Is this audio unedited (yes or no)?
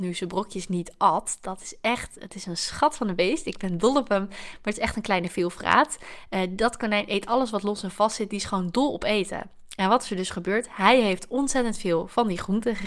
yes